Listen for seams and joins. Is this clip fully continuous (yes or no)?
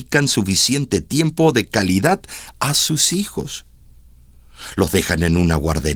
yes